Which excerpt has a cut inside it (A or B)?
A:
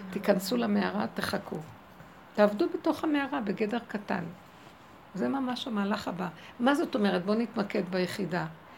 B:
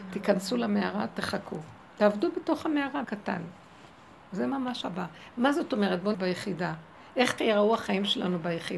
B